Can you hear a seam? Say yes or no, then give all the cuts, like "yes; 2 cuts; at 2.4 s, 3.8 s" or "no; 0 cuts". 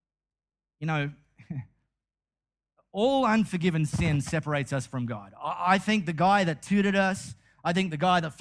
no; 0 cuts